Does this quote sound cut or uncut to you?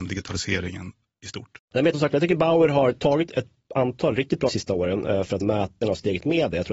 cut